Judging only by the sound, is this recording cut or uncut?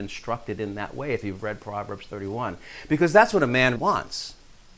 cut